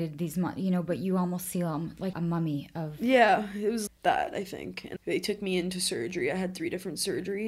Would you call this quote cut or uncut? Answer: cut